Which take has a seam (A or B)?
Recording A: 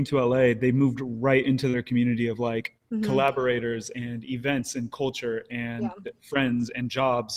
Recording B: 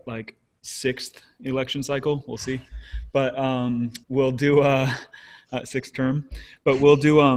B